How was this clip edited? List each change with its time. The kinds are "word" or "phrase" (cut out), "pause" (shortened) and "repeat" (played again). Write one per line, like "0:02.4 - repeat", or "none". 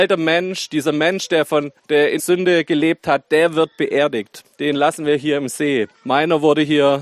0:01.8 - pause
0:02.2 - phrase
0:04.5 - pause
0:05.9 - pause